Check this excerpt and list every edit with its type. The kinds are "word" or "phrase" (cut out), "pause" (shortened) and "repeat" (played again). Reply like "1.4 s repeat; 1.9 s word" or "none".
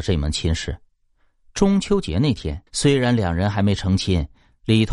2.7 s pause